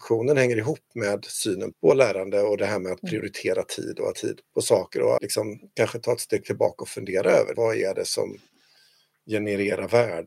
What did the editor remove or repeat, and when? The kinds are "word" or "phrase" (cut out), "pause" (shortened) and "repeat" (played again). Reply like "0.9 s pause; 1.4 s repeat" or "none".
1.7 s word; 4.1 s word; 4.4 s word; 5.2 s word; 7.5 s word